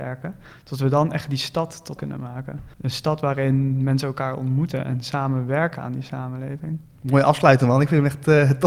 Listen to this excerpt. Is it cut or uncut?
cut